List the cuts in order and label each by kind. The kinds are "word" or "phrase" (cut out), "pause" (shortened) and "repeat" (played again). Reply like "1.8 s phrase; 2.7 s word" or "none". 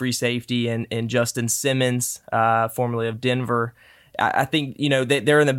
none